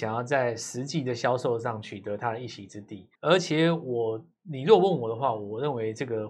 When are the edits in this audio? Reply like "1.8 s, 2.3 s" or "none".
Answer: 3.1 s